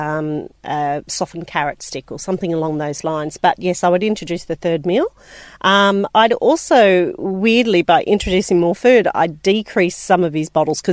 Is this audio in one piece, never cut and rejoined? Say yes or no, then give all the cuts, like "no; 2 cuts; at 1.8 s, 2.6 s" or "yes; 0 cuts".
yes; 0 cuts